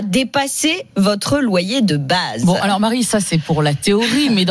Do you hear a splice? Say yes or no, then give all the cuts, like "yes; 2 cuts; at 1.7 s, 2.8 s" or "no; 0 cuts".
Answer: no; 0 cuts